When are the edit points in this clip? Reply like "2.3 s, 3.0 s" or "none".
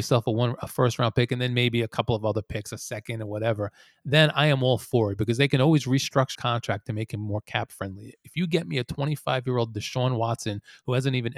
6.3 s

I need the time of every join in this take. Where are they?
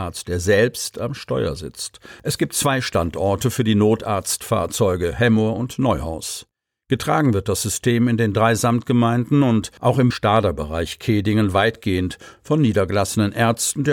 9.8 s, 10.1 s

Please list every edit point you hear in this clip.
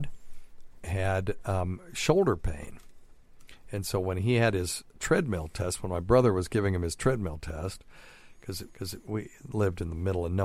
8.7 s

